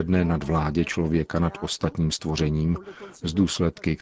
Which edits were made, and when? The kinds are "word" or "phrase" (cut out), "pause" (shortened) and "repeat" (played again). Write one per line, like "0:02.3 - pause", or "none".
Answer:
none